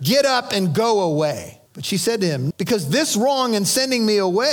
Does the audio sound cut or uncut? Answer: cut